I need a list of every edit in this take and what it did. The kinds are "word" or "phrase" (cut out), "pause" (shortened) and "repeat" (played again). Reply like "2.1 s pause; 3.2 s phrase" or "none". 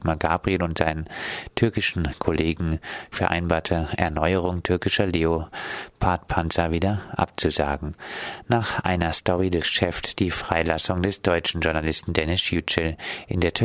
3.1 s word; 9.6 s phrase